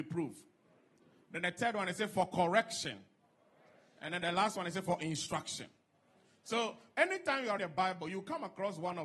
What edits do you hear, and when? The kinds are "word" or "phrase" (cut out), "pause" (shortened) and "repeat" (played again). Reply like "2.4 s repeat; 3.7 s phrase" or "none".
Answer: 7.6 s word